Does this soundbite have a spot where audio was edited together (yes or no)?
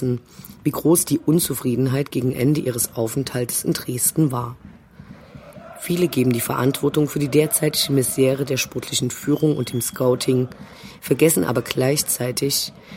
no